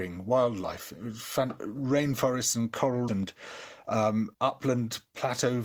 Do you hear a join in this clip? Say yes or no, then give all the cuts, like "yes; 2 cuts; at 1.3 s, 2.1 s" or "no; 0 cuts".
yes; 3 cuts; at 1.6 s, 3.1 s, 4.3 s